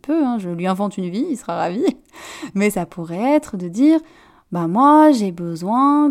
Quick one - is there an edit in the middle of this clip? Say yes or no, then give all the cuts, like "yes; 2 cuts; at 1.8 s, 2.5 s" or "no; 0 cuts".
no; 0 cuts